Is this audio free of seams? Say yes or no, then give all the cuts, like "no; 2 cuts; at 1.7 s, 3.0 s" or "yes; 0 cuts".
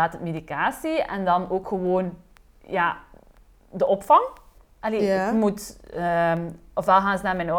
yes; 0 cuts